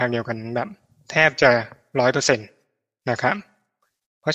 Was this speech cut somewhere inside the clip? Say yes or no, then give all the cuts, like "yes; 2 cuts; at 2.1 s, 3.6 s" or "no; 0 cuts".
no; 0 cuts